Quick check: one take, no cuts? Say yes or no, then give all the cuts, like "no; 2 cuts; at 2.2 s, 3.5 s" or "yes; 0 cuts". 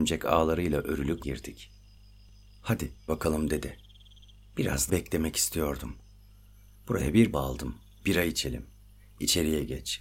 no; 4 cuts; at 1.2 s, 3.1 s, 4.9 s, 7.3 s